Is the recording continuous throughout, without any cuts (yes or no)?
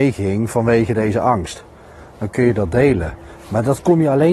yes